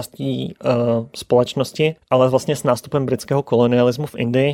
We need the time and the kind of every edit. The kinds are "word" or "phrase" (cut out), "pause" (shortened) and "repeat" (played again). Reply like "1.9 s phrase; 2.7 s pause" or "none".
2.0 s pause